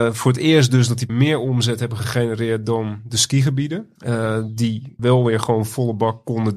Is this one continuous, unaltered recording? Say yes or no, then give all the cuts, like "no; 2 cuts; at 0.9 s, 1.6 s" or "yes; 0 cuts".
no; 3 cuts; at 1.1 s, 4.0 s, 5.0 s